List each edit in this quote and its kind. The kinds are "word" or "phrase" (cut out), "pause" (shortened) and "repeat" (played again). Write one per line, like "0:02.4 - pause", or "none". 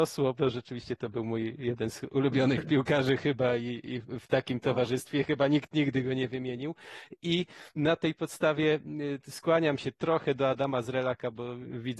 none